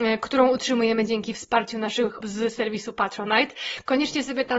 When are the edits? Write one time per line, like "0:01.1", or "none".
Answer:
0:02.2